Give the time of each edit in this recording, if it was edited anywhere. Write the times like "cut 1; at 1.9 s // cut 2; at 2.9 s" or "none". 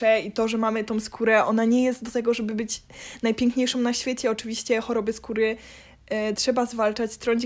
none